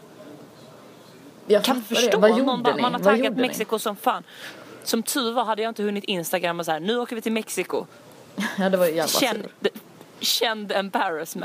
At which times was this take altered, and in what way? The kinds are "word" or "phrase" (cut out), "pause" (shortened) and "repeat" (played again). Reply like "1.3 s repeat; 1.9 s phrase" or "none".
10.1 s pause

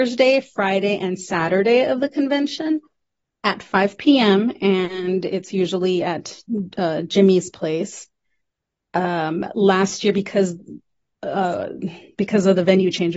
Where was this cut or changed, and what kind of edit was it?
none

